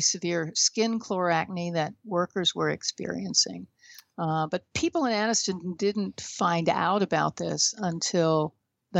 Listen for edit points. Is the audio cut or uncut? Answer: uncut